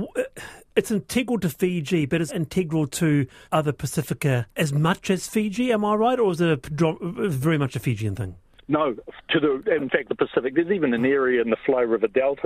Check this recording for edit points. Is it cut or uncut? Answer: cut